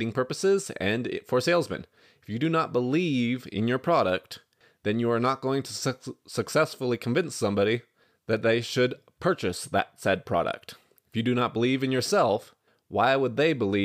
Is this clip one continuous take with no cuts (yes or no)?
yes